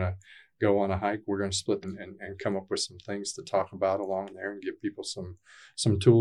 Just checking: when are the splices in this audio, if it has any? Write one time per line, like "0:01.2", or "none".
0:01.8